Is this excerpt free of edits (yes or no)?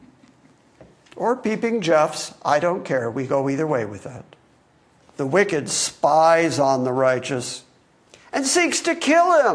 no